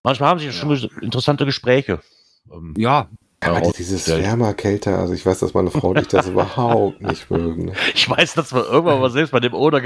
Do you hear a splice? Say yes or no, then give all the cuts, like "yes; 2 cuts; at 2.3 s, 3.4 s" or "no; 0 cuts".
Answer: yes; 1 cut; at 3.7 s